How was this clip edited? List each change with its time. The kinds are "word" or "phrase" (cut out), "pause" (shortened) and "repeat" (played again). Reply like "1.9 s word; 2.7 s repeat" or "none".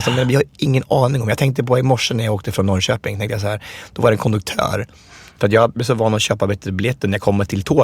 none